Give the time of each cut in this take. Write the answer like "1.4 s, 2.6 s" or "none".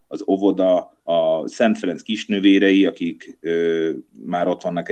1.0 s